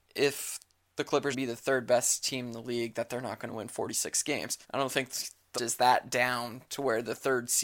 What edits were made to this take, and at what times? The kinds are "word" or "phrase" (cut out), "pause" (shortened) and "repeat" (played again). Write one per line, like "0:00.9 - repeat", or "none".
0:01.3 - phrase
0:04.6 - pause
0:05.5 - word